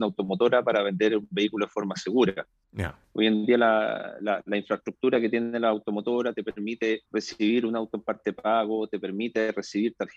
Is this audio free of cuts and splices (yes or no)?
no